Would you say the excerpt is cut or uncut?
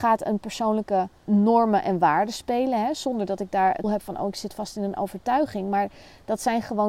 cut